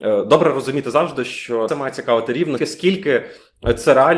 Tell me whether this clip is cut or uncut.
cut